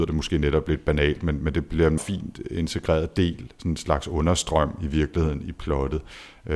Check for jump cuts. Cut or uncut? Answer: cut